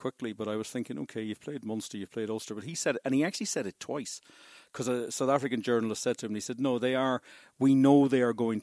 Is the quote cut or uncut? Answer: uncut